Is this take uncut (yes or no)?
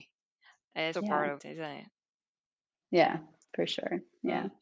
no